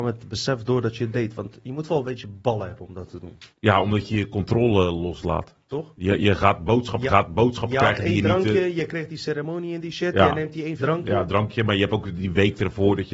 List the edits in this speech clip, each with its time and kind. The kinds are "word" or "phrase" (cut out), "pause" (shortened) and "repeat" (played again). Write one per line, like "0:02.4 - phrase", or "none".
0:03.5 - pause
0:07.1 - repeat
0:10.8 - word